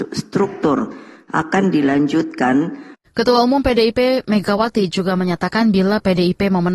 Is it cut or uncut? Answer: cut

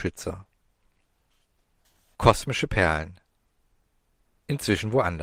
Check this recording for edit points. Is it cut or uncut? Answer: uncut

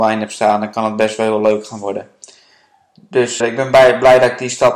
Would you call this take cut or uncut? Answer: cut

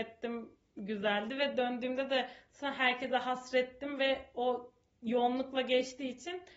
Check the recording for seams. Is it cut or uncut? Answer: uncut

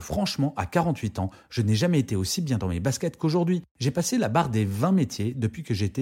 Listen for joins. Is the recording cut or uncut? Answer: cut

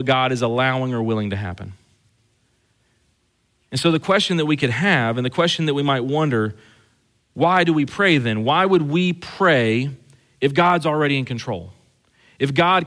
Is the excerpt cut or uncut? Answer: uncut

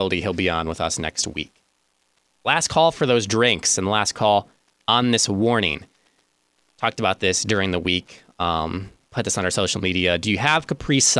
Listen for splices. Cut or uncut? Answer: uncut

